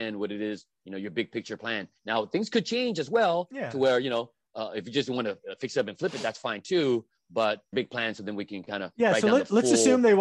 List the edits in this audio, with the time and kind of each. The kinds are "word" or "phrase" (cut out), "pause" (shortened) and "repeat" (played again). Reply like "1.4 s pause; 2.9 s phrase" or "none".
7.7 s phrase